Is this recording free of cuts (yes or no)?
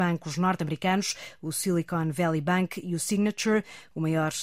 yes